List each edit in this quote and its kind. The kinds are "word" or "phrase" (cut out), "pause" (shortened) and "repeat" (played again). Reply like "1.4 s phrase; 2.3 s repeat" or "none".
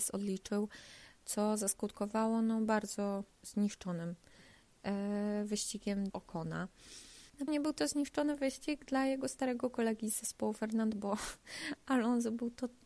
3.3 s pause; 6.1 s word; 7.5 s word; 10.9 s word